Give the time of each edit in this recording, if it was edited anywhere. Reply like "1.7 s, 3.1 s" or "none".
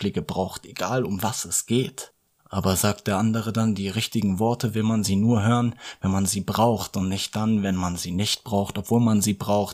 2.3 s